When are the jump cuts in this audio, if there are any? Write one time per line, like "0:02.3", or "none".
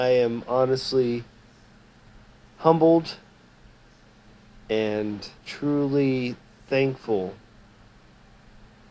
0:05.4